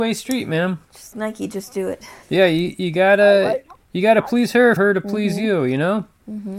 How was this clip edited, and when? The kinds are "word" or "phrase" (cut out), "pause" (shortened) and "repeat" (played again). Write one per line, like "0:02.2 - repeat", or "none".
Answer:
0:01.1 - word
0:02.2 - pause
0:04.8 - word